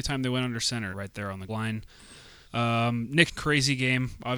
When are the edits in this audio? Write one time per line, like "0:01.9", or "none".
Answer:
0:00.9
0:01.5
0:02.4
0:03.3